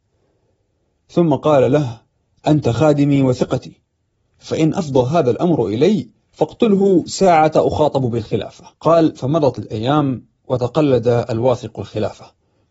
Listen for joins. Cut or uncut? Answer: cut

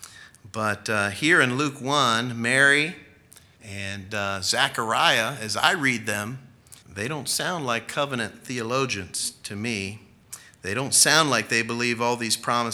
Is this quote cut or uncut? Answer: cut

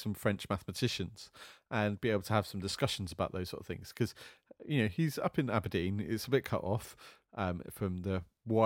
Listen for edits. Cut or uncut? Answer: uncut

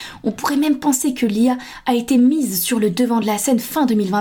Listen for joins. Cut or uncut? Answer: uncut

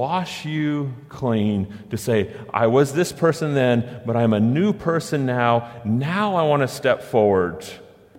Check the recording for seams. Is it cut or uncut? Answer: uncut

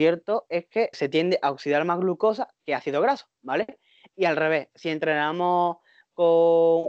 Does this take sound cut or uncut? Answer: cut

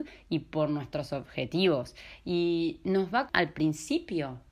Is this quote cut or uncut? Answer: cut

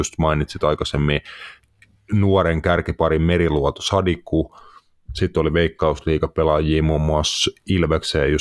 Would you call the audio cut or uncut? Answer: uncut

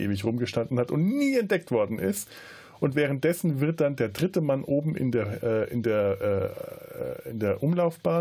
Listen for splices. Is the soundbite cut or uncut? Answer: uncut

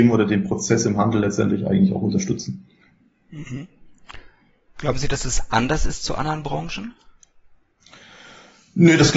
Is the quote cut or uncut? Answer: uncut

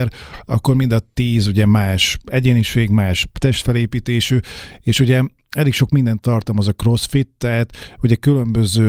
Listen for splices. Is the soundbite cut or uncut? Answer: uncut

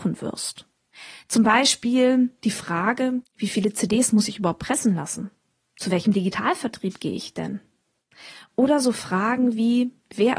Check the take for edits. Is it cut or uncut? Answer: uncut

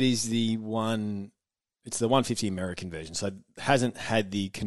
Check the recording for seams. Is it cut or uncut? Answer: uncut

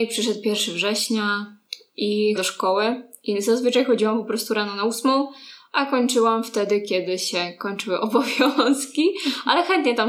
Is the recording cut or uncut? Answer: cut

